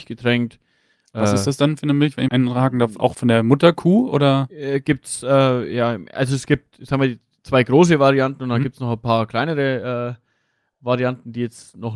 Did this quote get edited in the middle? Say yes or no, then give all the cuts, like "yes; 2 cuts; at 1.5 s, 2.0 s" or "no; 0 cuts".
yes; 2 cuts; at 2.3 s, 3.1 s